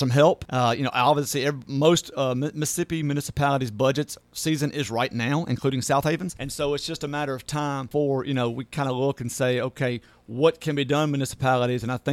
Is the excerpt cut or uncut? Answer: uncut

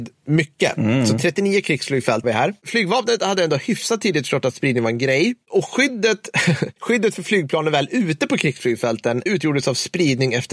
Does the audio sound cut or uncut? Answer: cut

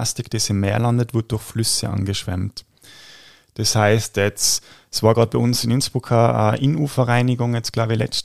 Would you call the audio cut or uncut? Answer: uncut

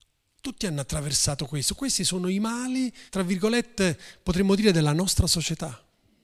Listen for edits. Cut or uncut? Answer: cut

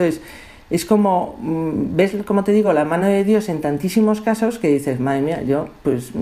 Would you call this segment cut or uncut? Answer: uncut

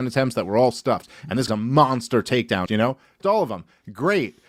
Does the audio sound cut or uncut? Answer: cut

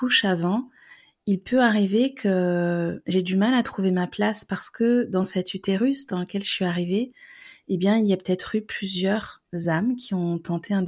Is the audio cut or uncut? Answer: uncut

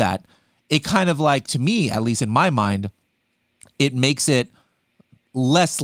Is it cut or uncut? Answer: uncut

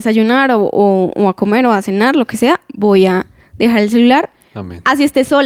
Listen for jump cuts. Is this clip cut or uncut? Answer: uncut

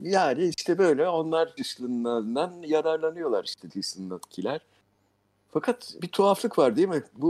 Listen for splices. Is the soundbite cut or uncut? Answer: cut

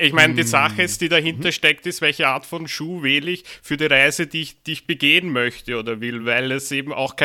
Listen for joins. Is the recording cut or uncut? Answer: uncut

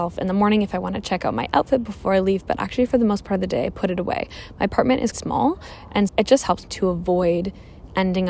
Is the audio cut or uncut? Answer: cut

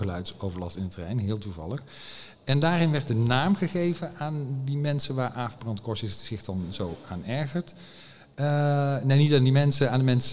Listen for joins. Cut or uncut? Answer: uncut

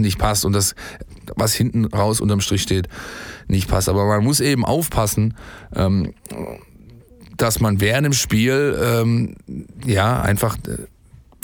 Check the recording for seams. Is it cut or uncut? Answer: uncut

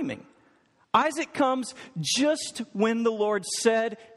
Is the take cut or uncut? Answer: uncut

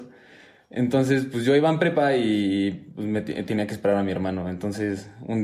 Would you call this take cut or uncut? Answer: uncut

